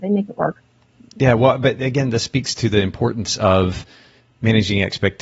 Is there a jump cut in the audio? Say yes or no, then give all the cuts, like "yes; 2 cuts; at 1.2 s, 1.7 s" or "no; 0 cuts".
no; 0 cuts